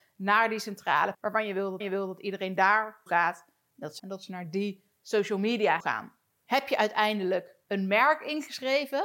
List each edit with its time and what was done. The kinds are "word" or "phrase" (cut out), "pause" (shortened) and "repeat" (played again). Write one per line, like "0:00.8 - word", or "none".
0:01.1 - word
0:01.8 - repeat
0:03.1 - word
0:04.0 - phrase
0:05.8 - word
0:07.6 - pause